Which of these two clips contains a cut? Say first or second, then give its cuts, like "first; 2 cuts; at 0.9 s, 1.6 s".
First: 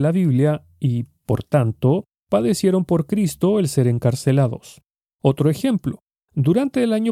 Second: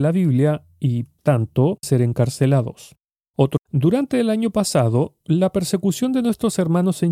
second; 3 cuts; at 1.2 s, 1.8 s, 3.6 s